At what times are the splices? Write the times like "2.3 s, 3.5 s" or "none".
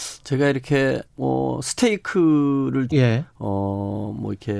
1.1 s, 2.9 s